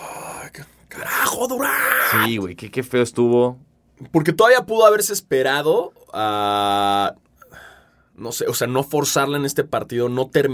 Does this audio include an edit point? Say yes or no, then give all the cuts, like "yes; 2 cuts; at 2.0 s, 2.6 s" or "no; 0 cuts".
no; 0 cuts